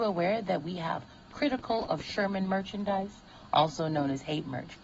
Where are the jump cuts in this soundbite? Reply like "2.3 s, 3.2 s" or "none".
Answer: none